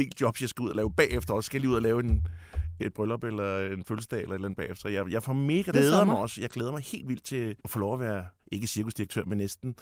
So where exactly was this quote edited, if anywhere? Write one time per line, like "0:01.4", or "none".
0:02.8
0:05.7
0:07.6
0:08.4

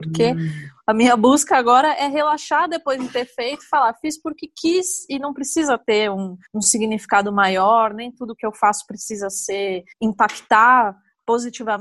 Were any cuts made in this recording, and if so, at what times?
0:06.5
0:09.9

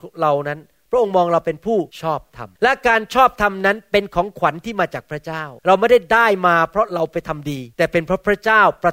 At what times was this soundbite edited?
0:01.9
0:02.6
0:05.6
0:07.7

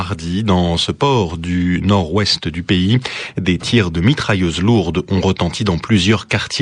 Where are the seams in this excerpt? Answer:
none

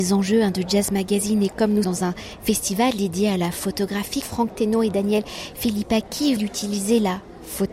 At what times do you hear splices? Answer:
0:01.8
0:04.2
0:06.4

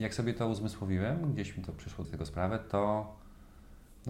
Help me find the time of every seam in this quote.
0:02.0

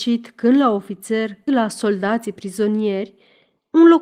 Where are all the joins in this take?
0:01.5

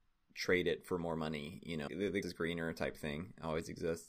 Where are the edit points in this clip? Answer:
0:01.9
0:02.2

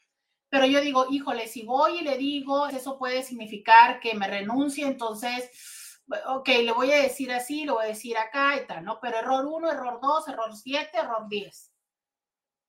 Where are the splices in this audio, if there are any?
0:02.7

